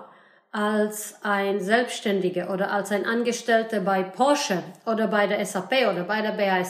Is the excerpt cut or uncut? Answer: uncut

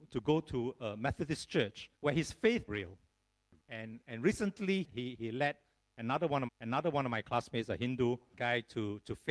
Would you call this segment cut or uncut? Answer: cut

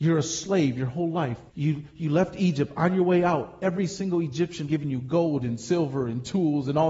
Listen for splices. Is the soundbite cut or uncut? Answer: cut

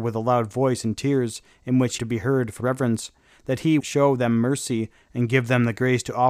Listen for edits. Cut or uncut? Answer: cut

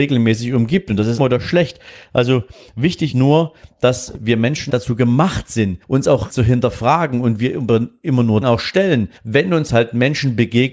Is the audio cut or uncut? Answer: cut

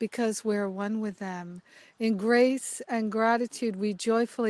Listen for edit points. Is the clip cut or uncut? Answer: uncut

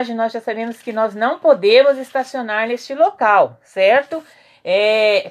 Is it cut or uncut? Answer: uncut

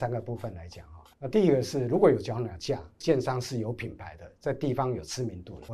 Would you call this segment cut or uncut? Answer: cut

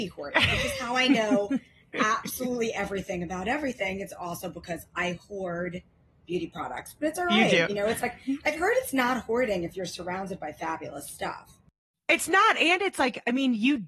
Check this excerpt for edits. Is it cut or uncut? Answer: uncut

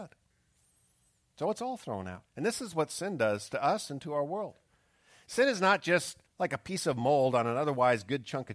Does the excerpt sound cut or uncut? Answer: cut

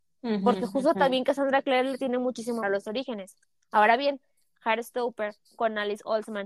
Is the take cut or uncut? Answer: cut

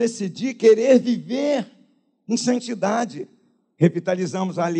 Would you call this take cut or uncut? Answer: uncut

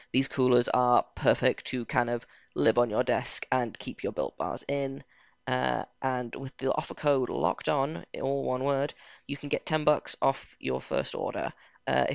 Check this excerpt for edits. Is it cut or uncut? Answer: uncut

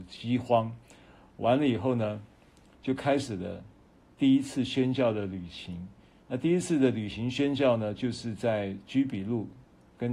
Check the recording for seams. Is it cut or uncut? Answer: uncut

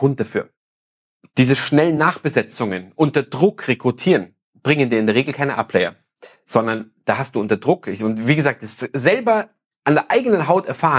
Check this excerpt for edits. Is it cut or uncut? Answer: uncut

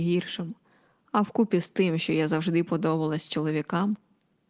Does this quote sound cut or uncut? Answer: uncut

